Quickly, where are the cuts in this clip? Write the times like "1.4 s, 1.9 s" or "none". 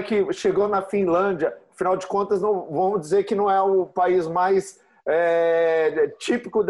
none